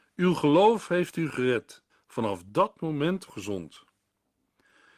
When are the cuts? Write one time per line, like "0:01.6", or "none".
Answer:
0:01.9
0:03.3